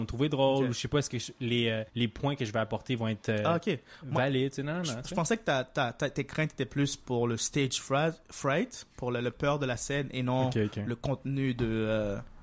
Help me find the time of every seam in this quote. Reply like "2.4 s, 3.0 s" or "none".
1.9 s